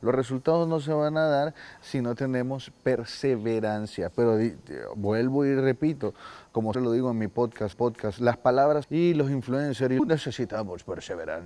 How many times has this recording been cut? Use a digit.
4